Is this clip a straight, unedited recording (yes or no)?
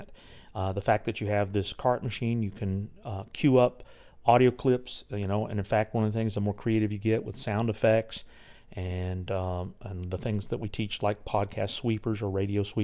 yes